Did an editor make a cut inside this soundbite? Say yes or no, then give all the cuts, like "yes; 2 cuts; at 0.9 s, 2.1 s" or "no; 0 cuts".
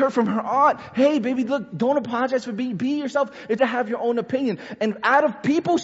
yes; 1 cut; at 3.6 s